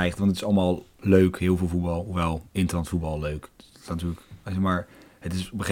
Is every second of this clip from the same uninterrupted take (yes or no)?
yes